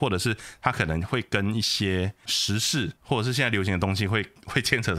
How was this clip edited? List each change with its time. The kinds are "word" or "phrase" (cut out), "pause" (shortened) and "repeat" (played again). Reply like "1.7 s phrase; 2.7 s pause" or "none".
3.0 s pause